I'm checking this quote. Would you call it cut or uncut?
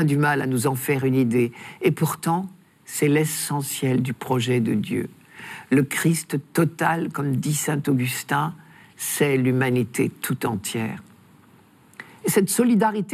uncut